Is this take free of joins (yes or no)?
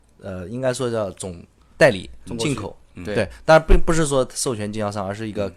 yes